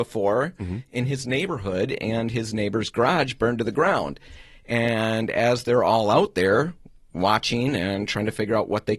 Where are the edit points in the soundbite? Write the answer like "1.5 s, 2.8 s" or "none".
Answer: none